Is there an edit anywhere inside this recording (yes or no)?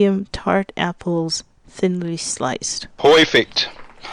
no